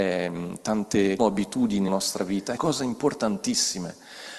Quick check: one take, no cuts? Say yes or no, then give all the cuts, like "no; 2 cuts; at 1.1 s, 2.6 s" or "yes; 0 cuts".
no; 3 cuts; at 1.2 s, 1.9 s, 2.6 s